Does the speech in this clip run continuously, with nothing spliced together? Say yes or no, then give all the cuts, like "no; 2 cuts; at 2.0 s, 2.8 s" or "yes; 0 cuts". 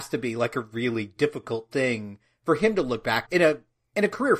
no; 1 cut; at 3.2 s